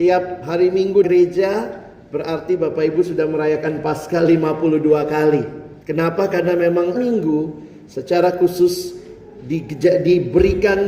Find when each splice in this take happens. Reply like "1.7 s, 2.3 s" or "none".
1.0 s, 5.8 s, 6.9 s